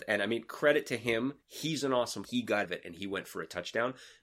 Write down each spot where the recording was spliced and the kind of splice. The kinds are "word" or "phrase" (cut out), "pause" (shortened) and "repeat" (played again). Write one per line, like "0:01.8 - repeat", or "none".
0:01.4 - pause
0:02.2 - phrase
0:02.6 - word